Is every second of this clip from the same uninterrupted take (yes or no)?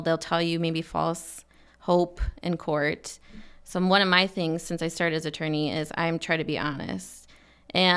yes